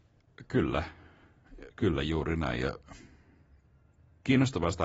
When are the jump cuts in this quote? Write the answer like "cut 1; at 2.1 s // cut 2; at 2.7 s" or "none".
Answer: cut 1; at 1.7 s